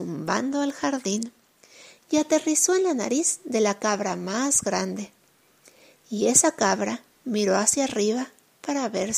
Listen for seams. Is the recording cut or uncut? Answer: uncut